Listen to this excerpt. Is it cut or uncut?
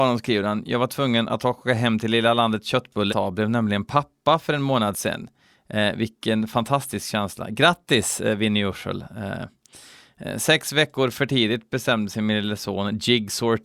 cut